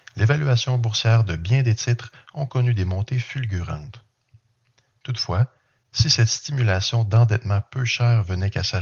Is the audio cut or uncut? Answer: uncut